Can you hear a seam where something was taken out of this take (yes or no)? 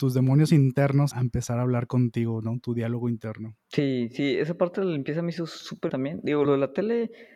yes